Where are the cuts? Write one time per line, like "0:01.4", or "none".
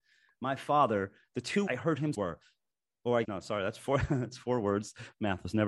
0:01.2
0:01.7
0:02.1
0:03.2